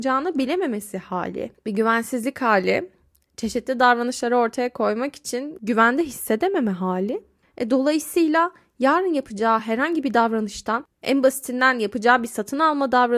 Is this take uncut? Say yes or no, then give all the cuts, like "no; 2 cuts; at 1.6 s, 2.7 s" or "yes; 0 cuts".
yes; 0 cuts